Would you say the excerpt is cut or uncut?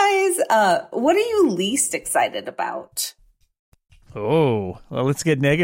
uncut